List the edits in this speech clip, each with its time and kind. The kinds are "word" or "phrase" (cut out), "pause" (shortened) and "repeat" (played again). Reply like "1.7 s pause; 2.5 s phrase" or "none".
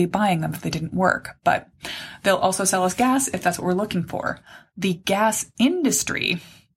none